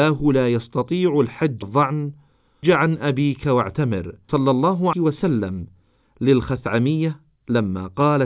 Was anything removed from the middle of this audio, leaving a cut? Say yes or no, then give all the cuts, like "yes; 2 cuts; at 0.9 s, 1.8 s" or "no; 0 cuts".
yes; 4 cuts; at 1.6 s, 2.6 s, 4.3 s, 4.9 s